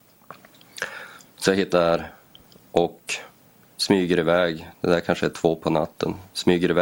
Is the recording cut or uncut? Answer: cut